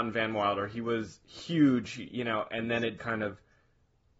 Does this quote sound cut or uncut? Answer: cut